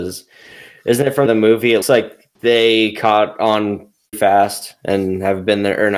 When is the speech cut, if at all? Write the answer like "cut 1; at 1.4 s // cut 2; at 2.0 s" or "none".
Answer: cut 1; at 1.3 s // cut 2; at 1.8 s // cut 3; at 2.3 s // cut 4; at 4.1 s